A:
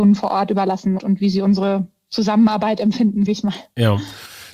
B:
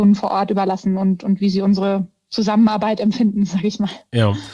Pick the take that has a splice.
A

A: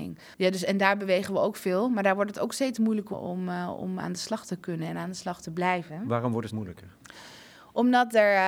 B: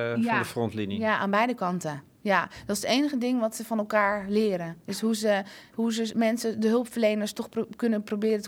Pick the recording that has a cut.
A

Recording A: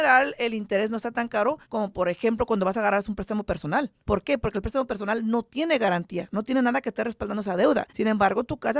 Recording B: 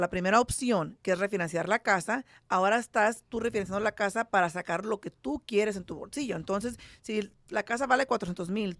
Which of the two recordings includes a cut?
A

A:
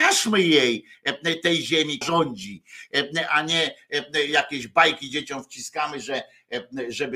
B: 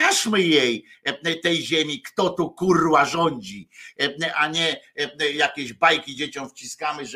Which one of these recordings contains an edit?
A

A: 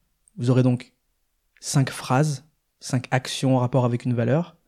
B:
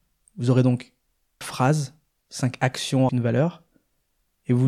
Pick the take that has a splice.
B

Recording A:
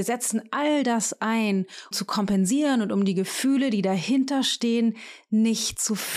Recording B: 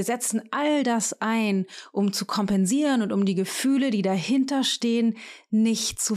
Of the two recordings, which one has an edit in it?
A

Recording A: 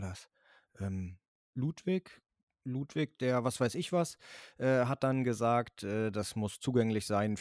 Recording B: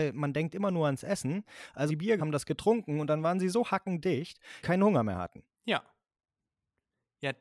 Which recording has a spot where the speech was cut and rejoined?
B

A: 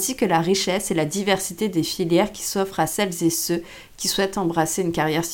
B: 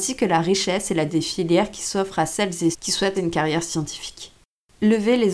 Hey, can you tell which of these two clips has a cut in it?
B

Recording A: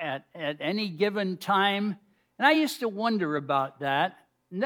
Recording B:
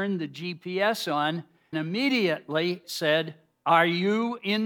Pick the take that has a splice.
B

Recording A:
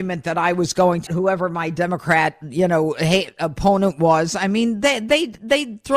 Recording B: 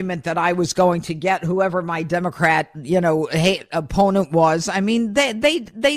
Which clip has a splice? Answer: A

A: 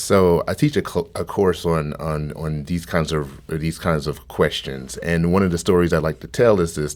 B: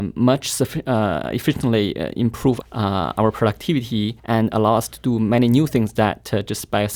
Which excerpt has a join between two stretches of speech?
B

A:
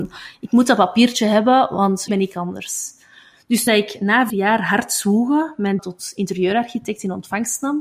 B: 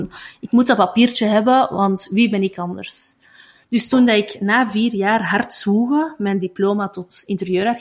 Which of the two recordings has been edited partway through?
A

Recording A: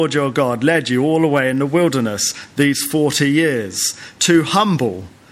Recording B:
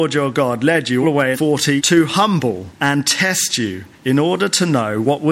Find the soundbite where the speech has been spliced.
B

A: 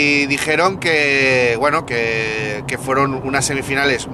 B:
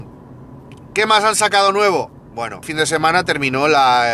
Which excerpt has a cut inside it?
B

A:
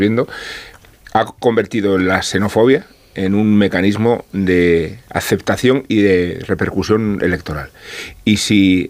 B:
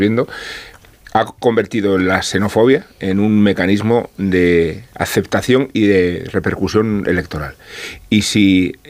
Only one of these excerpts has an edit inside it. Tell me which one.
B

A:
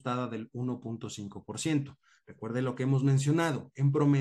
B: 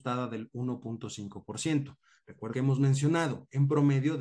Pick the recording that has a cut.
B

